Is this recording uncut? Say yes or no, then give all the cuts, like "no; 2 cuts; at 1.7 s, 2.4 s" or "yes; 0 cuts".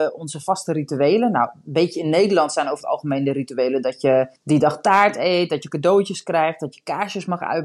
no; 1 cut; at 4.4 s